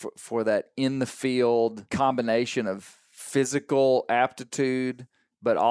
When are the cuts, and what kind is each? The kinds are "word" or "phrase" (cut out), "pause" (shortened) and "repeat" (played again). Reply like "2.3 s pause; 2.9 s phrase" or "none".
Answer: 1.9 s pause